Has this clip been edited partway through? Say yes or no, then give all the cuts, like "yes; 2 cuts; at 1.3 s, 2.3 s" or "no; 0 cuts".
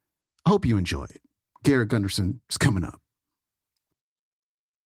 no; 0 cuts